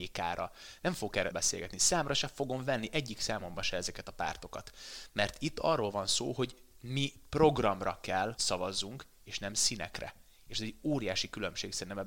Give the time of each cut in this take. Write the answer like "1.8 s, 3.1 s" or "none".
1.3 s, 8.4 s